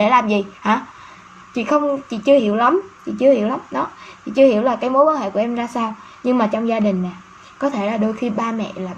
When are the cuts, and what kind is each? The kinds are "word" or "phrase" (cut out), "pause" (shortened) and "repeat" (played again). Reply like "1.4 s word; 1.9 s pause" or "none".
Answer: none